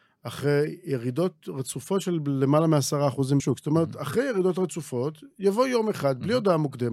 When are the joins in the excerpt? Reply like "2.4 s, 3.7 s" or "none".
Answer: 3.4 s